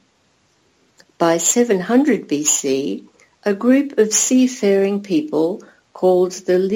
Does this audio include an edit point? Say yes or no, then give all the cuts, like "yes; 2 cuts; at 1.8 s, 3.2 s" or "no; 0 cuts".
no; 0 cuts